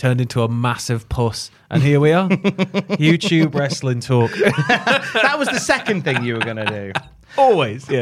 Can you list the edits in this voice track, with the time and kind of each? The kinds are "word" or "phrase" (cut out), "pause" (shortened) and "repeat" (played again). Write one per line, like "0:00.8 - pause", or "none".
none